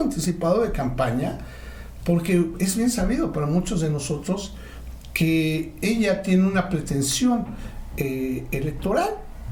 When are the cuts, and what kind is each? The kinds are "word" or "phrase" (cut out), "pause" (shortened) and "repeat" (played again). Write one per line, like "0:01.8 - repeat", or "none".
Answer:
none